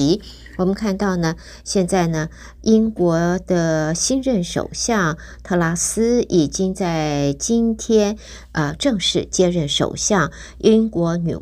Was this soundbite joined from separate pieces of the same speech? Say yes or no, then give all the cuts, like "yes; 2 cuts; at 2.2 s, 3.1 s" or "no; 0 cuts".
no; 0 cuts